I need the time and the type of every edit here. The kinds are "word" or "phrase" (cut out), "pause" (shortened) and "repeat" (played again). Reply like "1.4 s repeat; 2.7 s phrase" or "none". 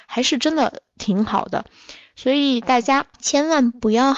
3.1 s pause